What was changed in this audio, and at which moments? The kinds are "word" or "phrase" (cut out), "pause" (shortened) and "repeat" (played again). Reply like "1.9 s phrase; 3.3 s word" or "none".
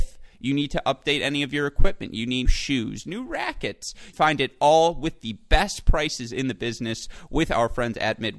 2.5 s word; 3.0 s phrase; 4.1 s phrase